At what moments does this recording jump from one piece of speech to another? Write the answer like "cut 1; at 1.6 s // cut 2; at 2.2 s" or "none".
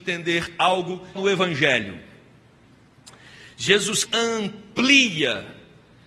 cut 1; at 1.2 s // cut 2; at 4.1 s